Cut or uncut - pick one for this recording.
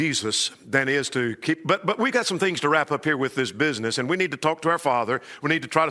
uncut